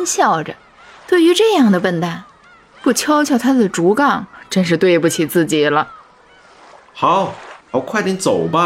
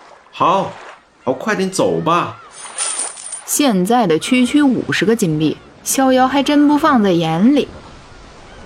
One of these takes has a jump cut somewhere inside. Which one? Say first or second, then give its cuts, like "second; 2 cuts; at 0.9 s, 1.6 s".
first; 1 cut; at 7.6 s